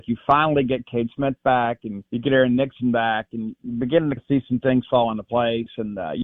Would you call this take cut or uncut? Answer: cut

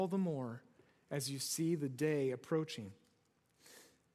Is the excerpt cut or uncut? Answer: uncut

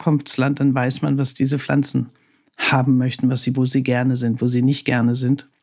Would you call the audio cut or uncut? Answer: cut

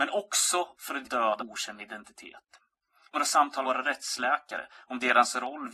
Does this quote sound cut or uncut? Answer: cut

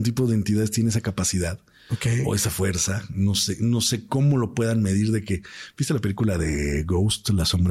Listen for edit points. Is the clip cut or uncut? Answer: uncut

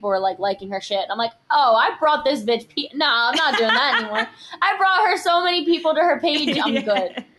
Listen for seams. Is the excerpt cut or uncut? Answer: uncut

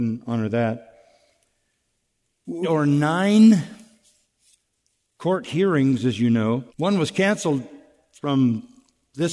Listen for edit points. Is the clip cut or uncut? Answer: cut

